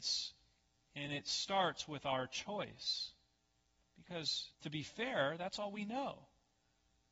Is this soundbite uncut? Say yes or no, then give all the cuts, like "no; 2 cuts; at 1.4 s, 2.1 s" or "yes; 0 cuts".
no; 1 cut; at 4.5 s